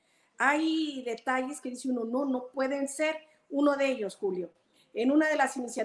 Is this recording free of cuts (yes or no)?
yes